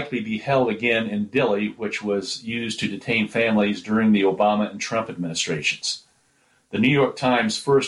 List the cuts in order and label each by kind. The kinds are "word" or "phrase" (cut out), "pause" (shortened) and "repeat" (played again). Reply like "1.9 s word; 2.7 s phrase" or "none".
none